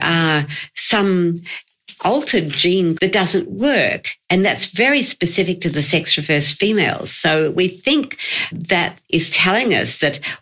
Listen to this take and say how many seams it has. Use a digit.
2